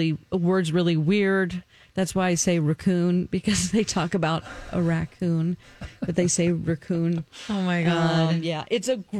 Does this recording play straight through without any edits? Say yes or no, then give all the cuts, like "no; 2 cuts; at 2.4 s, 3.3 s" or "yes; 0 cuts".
yes; 0 cuts